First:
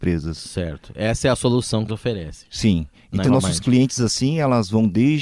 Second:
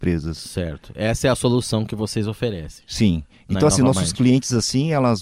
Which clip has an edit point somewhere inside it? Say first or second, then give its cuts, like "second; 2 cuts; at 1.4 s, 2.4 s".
first; 2 cuts; at 1.9 s, 3.2 s